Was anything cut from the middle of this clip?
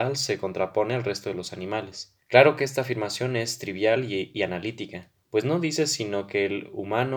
yes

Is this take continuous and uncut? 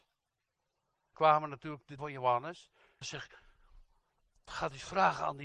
no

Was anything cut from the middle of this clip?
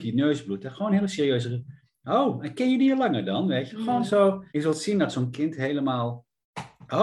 yes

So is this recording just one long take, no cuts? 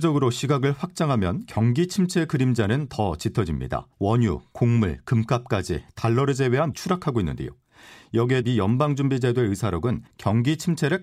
no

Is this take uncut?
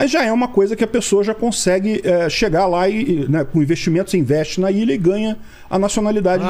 yes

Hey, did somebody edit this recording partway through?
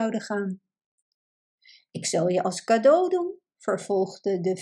no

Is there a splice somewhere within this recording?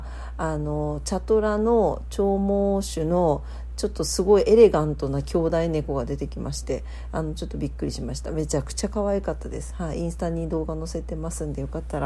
no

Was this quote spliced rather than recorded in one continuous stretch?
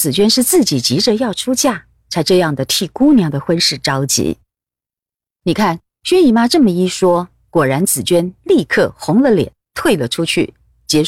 no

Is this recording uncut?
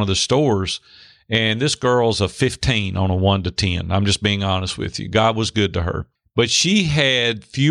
yes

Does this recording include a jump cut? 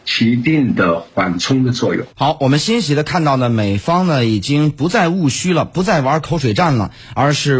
yes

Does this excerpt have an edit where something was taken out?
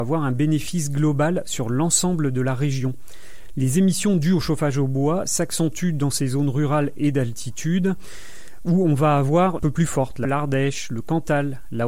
yes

